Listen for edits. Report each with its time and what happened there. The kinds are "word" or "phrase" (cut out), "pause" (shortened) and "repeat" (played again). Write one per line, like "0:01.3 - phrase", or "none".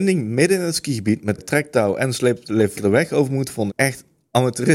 0:01.4 - word
0:02.7 - phrase
0:03.7 - word